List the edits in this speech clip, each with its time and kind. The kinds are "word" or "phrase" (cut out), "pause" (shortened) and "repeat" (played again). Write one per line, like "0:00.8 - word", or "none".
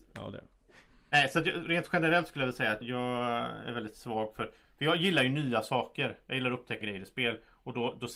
0:02.8 - word
0:06.8 - word